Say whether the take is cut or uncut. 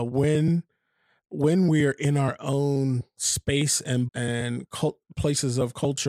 cut